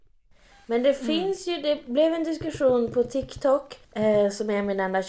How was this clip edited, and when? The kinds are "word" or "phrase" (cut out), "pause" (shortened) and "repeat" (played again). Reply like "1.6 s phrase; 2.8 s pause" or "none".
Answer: 3.8 s pause